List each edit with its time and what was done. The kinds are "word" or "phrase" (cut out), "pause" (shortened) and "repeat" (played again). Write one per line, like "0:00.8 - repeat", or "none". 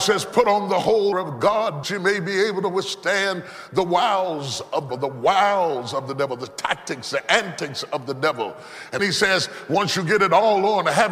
0:01.1 - word
0:01.8 - word
0:04.9 - word
0:09.0 - word